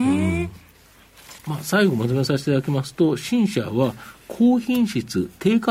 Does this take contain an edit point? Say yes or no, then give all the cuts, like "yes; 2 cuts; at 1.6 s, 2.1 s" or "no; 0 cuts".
yes; 1 cut; at 1.4 s